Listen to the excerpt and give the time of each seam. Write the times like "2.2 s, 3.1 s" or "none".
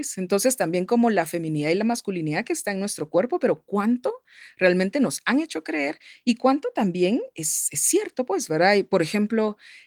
none